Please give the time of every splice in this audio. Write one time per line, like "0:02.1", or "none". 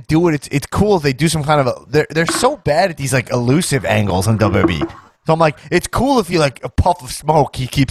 none